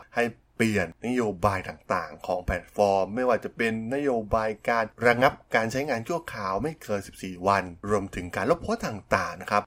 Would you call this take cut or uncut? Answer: uncut